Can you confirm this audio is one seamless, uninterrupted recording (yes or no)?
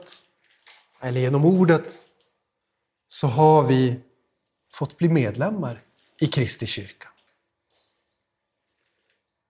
yes